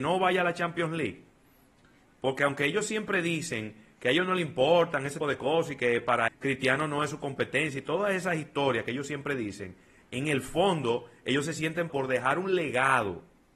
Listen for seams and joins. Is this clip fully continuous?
no; 3 cuts; at 5.2 s, 6.3 s, 11.9 s

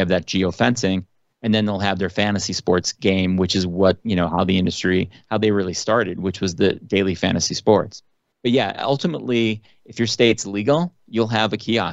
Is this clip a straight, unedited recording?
yes; 0 cuts

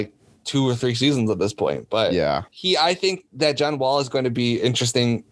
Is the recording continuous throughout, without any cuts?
no; 1 cut; at 2.5 s

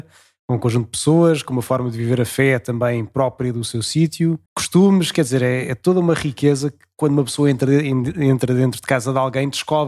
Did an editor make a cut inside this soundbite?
yes; 1 cut; at 4.5 s

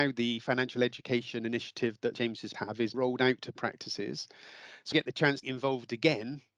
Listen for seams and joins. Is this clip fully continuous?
no; 6 cuts; at 2.1 s, 2.5 s, 2.9 s, 3.5 s, 4.9 s, 5.4 s

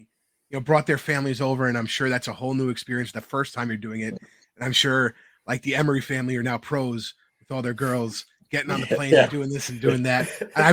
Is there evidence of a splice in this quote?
no; 0 cuts

